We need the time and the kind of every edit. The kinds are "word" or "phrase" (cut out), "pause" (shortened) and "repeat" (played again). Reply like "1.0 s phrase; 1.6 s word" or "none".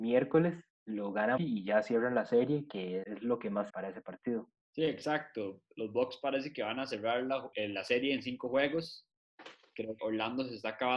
1.4 s word; 3.0 s word; 3.7 s word; 7.5 s word; 10.0 s word